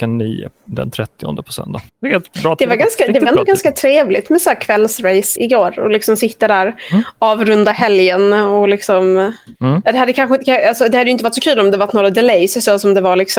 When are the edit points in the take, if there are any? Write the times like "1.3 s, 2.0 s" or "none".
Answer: 1.9 s, 5.4 s, 9.5 s